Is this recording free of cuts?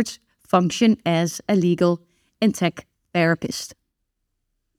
yes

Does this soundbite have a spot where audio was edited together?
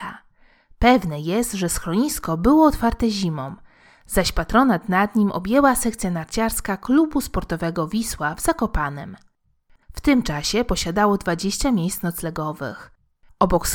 no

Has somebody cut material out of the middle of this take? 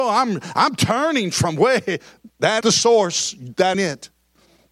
yes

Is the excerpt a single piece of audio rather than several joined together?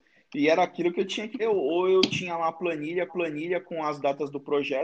no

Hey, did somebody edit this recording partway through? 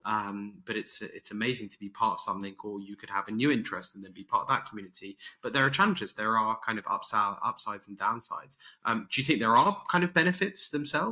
no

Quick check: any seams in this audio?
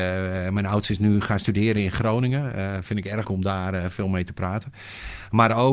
yes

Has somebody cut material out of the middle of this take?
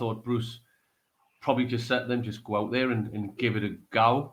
no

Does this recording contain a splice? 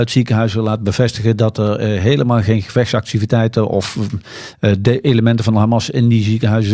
no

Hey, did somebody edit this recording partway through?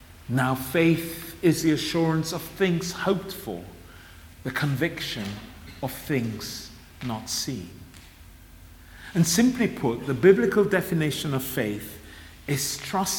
no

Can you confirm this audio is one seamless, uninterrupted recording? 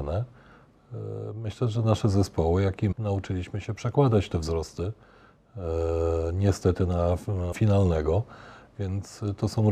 no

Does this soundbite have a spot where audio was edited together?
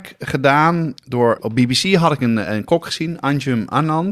yes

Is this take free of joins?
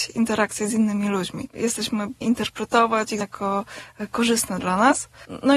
no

